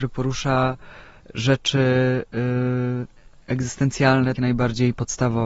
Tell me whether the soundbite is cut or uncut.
cut